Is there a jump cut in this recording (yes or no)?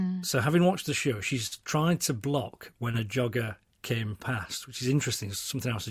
no